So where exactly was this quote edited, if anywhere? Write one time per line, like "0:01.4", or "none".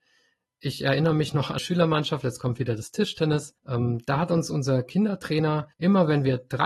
0:01.6
0:03.6
0:05.7